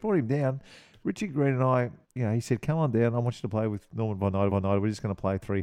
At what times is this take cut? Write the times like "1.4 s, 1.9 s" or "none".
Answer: 2.0 s, 4.5 s